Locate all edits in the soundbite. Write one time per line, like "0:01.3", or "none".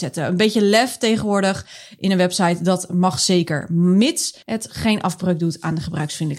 0:04.4